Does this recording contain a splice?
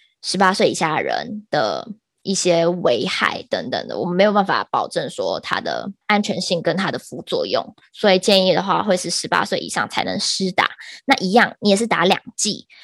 yes; 1 cut; at 6.0 s

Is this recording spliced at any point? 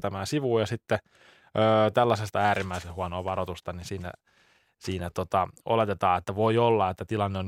yes; 1 cut; at 2.3 s

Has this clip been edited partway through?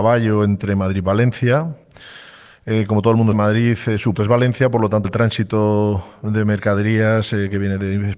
yes; 3 cuts; at 3.3 s, 4.2 s, 5.0 s

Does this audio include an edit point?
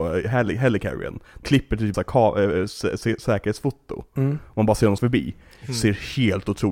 yes; 3 cuts; at 1.4 s, 1.9 s, 5.0 s

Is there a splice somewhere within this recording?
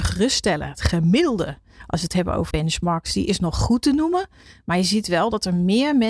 yes; 1 cut; at 2.5 s

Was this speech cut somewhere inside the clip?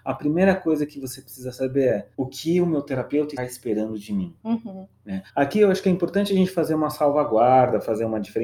yes; 4 cuts; at 2.1 s, 3.4 s, 4.4 s, 5.3 s

